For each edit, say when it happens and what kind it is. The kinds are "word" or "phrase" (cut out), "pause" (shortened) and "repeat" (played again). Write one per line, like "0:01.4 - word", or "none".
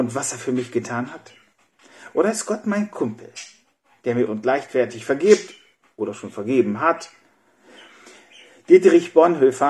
0:04.3 - phrase